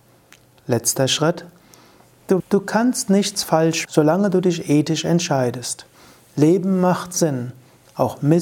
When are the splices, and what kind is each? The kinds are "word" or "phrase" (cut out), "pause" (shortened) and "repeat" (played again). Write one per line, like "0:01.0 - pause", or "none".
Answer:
0:02.4 - word
0:03.8 - word